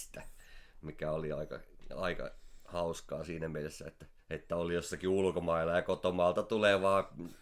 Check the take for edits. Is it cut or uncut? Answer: cut